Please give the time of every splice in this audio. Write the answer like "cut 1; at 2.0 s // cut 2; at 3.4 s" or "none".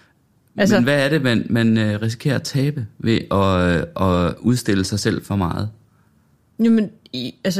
none